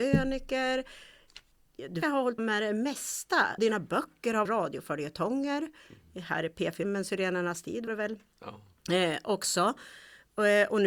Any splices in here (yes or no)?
yes